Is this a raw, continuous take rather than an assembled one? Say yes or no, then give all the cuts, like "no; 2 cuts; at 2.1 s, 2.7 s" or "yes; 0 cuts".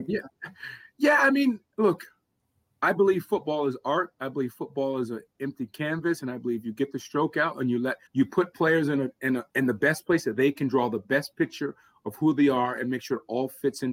no; 2 cuts; at 8.1 s, 9.5 s